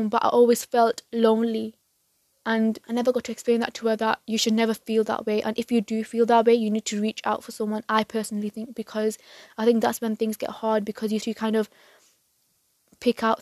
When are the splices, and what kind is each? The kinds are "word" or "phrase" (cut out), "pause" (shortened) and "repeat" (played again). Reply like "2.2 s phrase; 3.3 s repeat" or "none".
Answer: 2.8 s pause; 11.2 s word